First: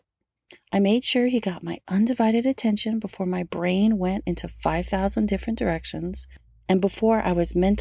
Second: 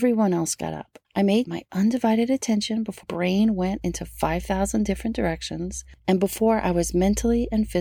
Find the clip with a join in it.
second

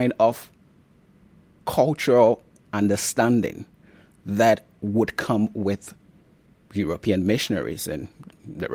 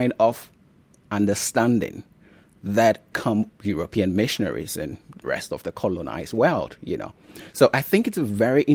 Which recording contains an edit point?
second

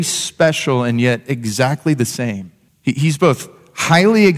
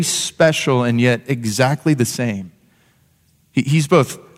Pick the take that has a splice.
first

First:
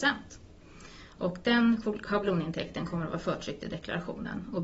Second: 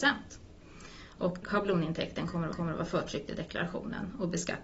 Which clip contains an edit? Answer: second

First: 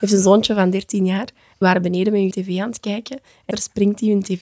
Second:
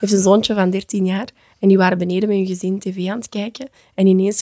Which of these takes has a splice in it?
first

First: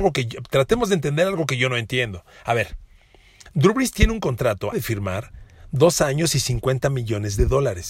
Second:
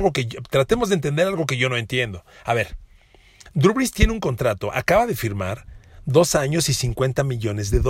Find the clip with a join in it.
first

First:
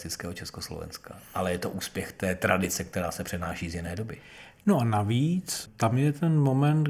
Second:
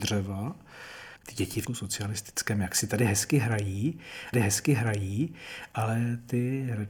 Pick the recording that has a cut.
second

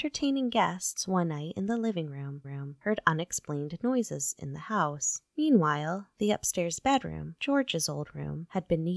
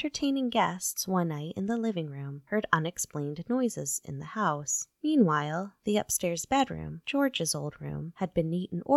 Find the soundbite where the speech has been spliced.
first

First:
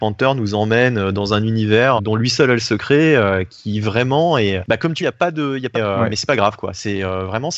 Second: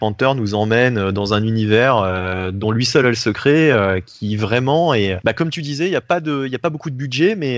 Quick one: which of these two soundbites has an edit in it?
first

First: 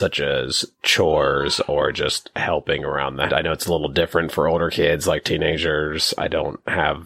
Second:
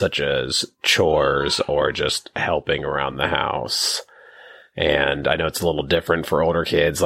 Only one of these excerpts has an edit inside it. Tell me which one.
first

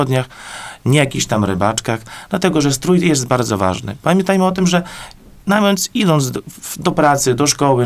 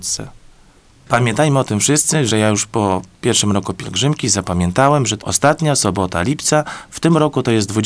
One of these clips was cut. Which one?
second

